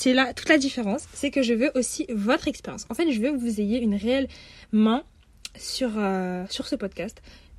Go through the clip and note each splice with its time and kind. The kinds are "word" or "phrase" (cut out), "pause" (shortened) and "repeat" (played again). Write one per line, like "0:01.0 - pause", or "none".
none